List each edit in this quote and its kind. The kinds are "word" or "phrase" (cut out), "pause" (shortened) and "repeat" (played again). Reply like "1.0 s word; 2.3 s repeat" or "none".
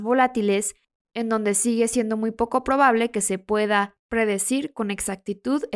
4.0 s pause